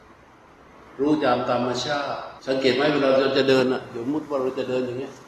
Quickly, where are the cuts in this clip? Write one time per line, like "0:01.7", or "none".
0:02.4

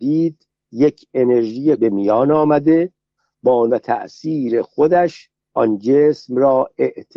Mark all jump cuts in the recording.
0:01.8
0:03.7

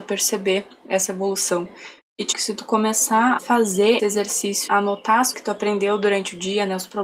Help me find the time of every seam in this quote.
0:02.3
0:03.4
0:04.0
0:04.7
0:05.3

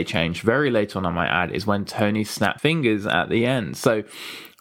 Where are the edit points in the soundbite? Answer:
0:02.6

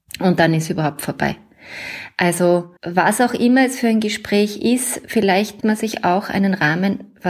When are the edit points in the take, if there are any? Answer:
0:02.8
0:05.6

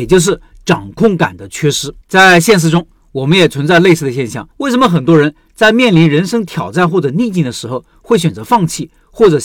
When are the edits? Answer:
0:02.0
0:04.5

